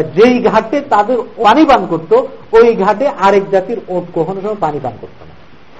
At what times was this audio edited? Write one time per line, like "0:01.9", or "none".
0:01.4